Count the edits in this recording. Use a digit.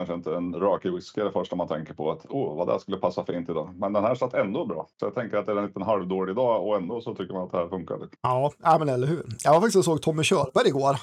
2